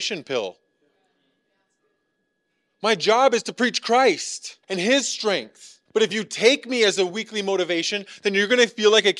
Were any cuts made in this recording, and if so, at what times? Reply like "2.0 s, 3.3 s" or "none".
4.6 s, 5.9 s